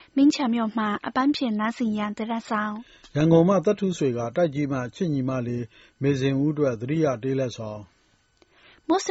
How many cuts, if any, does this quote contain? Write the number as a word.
zero